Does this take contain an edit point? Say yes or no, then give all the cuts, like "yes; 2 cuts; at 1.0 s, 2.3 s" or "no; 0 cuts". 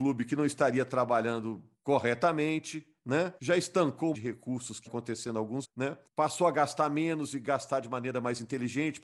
yes; 5 cuts; at 3.4 s, 4.1 s, 4.9 s, 5.6 s, 6.0 s